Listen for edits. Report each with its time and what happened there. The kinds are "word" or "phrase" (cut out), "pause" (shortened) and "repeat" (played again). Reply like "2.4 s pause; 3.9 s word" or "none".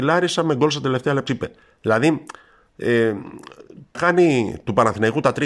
1.3 s word; 3.9 s word